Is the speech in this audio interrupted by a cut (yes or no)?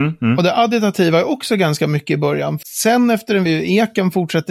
yes